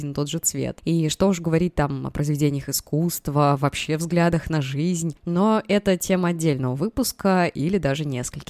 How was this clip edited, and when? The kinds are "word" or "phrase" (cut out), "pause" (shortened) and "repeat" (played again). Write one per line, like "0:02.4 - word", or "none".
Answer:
none